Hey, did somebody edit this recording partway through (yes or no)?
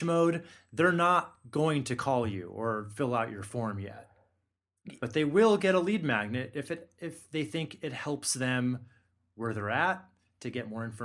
no